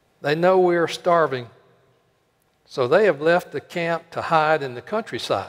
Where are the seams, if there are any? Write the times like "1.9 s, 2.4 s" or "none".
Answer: none